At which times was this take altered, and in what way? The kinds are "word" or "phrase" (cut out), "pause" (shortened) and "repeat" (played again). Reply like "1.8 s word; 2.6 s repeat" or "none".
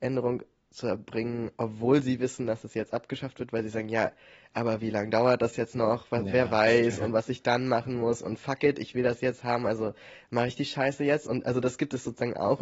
1.5 s pause